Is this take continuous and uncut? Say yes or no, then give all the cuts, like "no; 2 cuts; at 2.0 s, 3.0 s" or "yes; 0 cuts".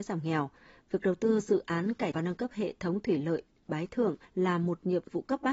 no; 2 cuts; at 2.1 s, 4.2 s